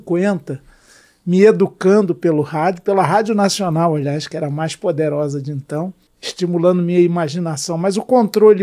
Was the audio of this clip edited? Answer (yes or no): no